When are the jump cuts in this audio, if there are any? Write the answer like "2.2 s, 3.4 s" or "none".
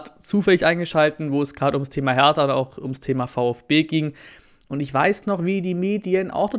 none